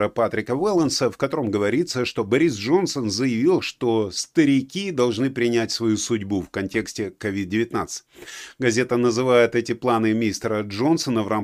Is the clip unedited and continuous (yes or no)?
yes